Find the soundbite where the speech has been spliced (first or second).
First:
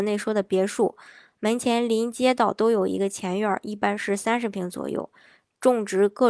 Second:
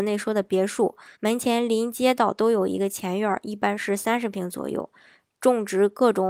second